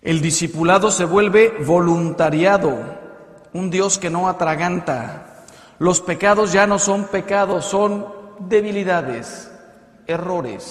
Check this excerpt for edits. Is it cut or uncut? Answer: uncut